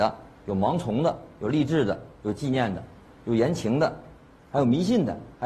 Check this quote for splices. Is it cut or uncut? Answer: cut